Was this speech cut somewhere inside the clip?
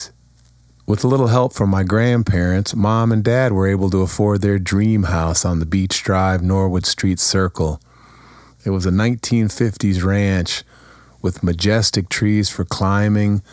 no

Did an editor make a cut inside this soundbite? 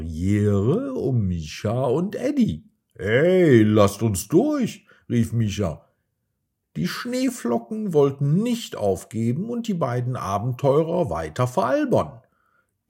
no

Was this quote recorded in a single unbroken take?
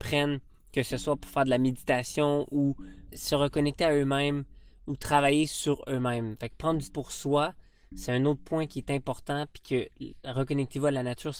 no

